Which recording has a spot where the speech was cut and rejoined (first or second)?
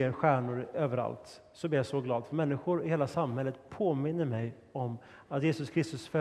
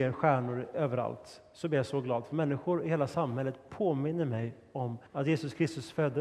second